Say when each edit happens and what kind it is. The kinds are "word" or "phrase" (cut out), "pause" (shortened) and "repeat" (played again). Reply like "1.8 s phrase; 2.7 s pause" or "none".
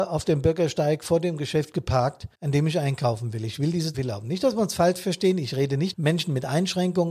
2.3 s pause; 3.9 s phrase; 5.9 s word